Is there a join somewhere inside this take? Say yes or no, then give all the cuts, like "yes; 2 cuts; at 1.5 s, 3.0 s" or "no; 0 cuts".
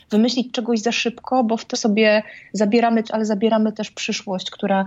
yes; 2 cuts; at 1.7 s, 3.0 s